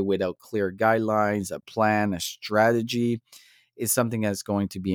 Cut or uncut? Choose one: uncut